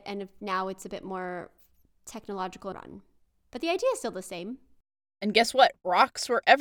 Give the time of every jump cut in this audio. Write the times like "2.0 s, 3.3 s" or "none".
2.7 s